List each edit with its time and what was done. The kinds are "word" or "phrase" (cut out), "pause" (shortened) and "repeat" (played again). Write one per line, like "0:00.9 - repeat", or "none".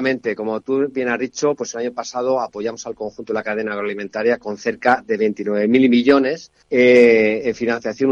0:06.6 - pause